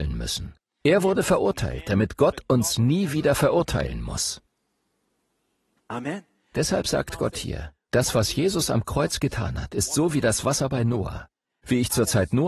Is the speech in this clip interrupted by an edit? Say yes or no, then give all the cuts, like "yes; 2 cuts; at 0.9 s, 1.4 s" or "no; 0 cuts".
no; 0 cuts